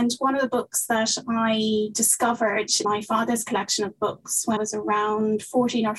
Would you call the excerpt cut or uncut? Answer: cut